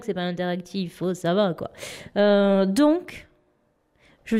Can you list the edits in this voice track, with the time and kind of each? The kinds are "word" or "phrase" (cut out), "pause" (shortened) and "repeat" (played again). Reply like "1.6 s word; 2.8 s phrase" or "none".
none